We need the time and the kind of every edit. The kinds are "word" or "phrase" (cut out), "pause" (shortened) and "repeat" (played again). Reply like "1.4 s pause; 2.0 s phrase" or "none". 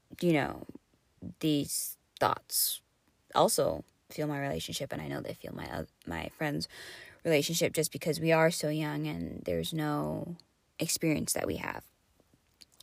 none